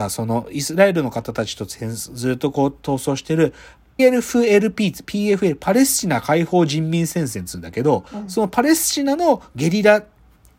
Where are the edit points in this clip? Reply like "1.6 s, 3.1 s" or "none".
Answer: 4.0 s, 8.1 s